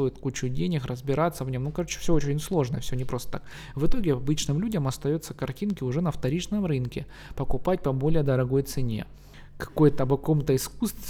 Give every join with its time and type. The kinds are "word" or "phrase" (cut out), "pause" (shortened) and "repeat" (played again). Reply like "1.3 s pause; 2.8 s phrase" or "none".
none